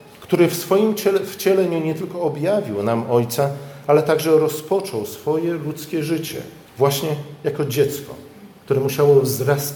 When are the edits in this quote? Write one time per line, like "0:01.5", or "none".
0:06.7